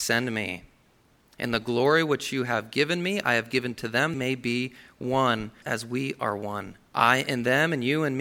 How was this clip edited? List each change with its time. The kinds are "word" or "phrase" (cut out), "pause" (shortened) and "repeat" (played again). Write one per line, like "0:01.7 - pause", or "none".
0:04.1 - phrase
0:05.6 - word
0:06.9 - pause